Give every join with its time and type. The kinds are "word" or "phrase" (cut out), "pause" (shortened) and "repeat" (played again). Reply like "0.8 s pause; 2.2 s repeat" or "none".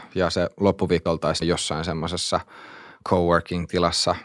1.1 s word; 1.4 s word